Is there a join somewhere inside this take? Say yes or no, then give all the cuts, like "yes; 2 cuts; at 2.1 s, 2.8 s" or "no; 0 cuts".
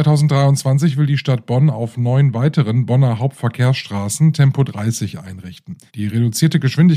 yes; 1 cut; at 5.9 s